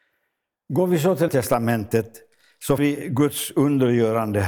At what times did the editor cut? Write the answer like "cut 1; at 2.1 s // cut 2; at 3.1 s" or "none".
cut 1; at 1.3 s // cut 2; at 2.8 s